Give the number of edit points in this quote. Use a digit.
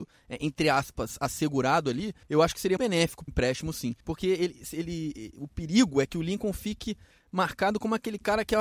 4